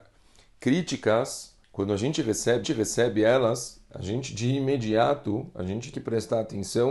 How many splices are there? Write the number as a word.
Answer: three